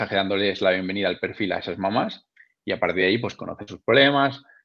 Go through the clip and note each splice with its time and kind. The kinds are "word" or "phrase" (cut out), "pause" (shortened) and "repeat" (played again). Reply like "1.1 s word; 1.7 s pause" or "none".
none